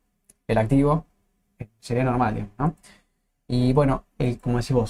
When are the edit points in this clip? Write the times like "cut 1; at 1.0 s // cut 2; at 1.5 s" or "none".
none